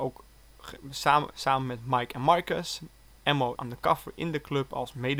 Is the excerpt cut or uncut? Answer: cut